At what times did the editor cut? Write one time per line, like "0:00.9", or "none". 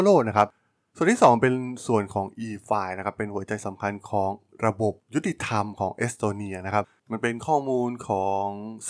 none